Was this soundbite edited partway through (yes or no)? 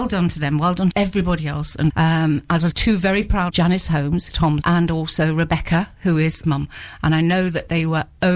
yes